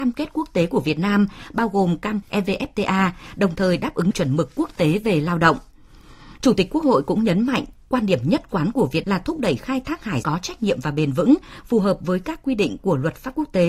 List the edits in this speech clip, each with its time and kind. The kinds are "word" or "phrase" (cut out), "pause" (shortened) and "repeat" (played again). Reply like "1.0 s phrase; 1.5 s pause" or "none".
2.2 s phrase; 4.1 s word; 9.0 s word; 10.2 s word